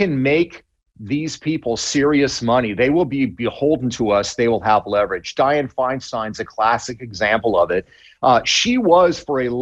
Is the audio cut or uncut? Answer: uncut